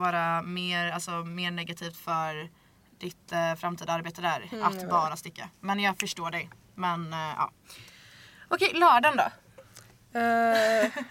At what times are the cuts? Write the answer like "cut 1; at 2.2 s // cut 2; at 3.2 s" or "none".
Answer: none